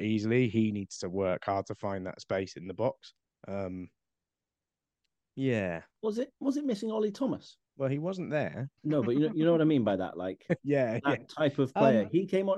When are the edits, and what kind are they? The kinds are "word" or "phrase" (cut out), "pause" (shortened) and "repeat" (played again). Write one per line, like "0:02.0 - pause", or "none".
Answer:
0:03.2 - pause
0:06.4 - pause
0:07.7 - pause
0:08.8 - pause